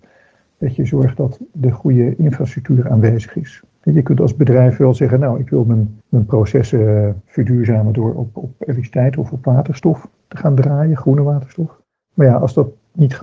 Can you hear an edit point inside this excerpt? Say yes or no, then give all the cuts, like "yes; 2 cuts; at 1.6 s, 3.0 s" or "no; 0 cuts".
yes; 4 cuts; at 3.7 s, 6.0 s, 7.3 s, 11.9 s